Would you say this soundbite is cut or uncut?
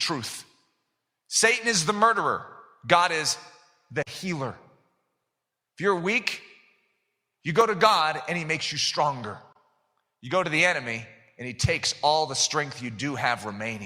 uncut